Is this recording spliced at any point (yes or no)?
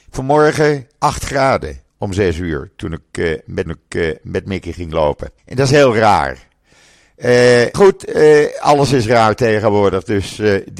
yes